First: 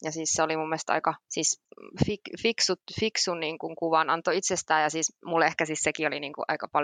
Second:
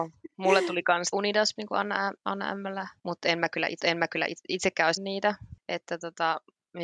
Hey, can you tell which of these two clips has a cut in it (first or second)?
second